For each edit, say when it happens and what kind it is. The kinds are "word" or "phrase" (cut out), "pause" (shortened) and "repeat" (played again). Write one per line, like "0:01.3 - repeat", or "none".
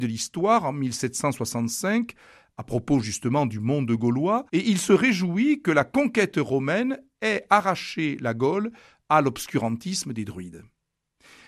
0:04.5 - pause